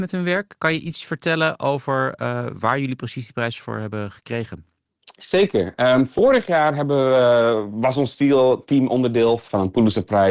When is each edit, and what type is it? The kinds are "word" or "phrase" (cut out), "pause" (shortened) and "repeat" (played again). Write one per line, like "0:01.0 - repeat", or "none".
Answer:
none

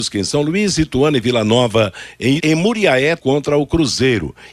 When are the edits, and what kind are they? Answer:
0:02.4 - word
0:03.2 - word

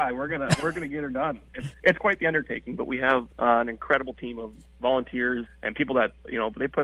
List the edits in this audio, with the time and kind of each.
0:01.7 - word
0:03.3 - pause
0:05.5 - word

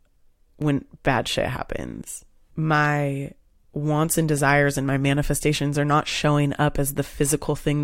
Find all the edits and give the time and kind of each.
none

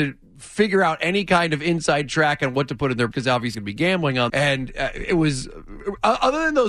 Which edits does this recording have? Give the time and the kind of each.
0:03.1 - word
0:03.5 - word
0:04.3 - word

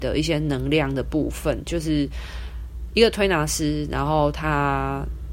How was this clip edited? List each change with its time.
none

